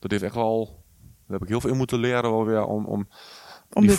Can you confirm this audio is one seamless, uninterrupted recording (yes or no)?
yes